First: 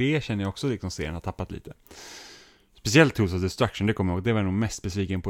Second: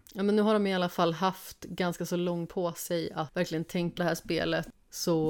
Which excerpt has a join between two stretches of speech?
second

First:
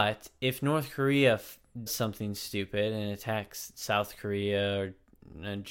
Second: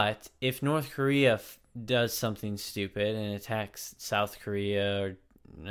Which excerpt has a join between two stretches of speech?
first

